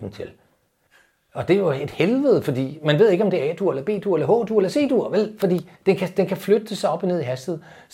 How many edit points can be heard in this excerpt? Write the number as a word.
one